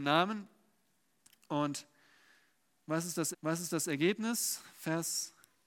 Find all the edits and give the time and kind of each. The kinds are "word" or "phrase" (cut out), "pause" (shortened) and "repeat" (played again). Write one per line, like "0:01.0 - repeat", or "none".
0:03.3 - repeat